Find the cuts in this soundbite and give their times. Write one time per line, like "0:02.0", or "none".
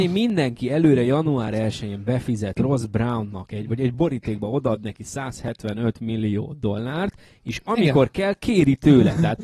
none